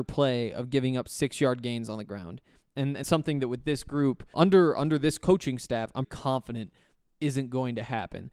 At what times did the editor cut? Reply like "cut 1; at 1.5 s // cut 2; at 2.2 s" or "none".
cut 1; at 3.0 s // cut 2; at 4.3 s // cut 3; at 6.0 s